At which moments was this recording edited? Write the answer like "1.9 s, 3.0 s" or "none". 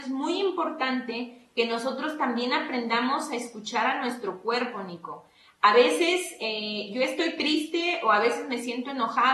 none